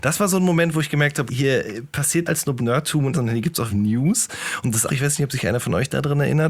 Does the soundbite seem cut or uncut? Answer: cut